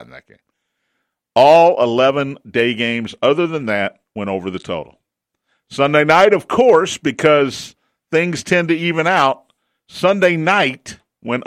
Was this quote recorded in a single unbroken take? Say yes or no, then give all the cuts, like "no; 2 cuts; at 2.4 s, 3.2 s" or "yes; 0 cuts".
yes; 0 cuts